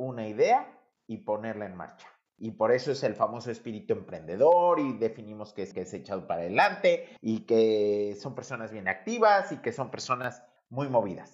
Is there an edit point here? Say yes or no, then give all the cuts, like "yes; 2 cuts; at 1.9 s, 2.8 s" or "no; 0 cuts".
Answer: yes; 2 cuts; at 5.7 s, 7.2 s